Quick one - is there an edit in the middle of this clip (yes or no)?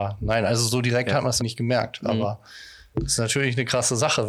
yes